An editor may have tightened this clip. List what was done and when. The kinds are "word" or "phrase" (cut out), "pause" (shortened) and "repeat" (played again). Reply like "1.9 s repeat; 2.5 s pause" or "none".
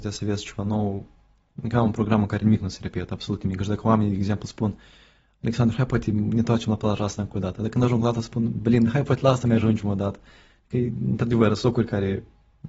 none